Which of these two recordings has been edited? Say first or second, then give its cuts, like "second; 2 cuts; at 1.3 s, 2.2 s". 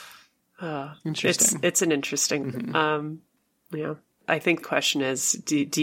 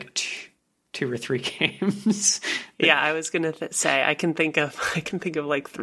first; 3 cuts; at 2.4 s, 4.2 s, 4.6 s